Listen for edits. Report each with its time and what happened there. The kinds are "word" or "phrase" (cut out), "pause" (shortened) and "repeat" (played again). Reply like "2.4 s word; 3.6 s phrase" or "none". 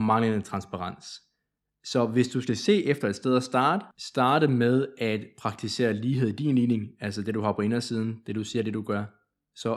none